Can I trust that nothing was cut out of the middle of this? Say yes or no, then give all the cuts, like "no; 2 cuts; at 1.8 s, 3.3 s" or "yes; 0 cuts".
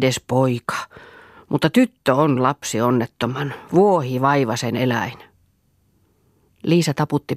yes; 0 cuts